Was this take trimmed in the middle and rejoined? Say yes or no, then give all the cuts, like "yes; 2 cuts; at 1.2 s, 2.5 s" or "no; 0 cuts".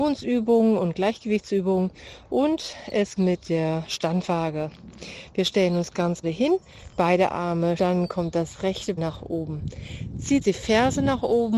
yes; 5 cuts; at 3.2 s, 6.2 s, 7.8 s, 9.0 s, 10.4 s